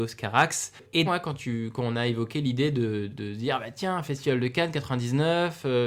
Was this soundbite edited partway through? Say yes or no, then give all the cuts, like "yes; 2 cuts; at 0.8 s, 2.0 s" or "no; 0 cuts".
yes; 2 cuts; at 1.1 s, 3.1 s